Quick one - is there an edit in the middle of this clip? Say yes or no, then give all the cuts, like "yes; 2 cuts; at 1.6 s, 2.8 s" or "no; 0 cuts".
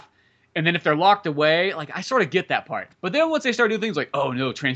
yes; 1 cut; at 2.9 s